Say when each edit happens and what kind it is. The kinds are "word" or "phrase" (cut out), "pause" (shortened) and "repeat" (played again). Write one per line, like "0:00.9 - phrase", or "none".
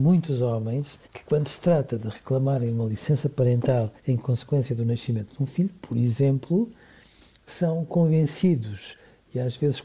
0:01.0 - pause
0:04.0 - pause